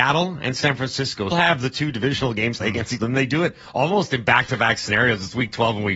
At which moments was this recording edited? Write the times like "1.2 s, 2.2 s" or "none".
1.3 s, 2.6 s, 3.0 s